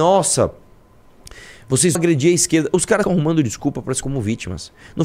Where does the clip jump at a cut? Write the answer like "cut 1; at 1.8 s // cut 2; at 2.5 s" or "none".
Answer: cut 1; at 1.9 s // cut 2; at 3.0 s // cut 3; at 4.0 s